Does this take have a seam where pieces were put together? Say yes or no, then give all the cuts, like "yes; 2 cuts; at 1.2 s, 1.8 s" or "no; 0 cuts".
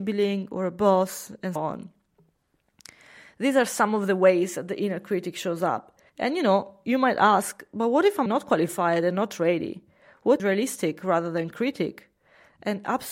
yes; 4 cuts; at 1.6 s, 6.1 s, 8.3 s, 10.4 s